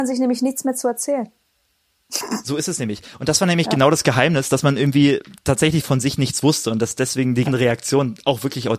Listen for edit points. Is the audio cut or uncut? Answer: cut